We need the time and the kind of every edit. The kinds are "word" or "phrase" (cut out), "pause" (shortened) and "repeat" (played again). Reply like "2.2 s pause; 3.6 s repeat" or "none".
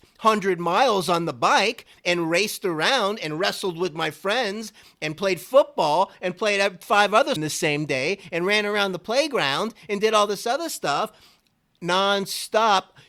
7.4 s phrase